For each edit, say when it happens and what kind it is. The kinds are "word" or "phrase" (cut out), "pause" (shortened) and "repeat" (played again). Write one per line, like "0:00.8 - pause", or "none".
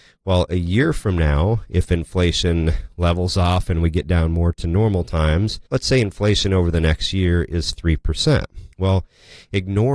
0:05.7 - pause
0:08.7 - pause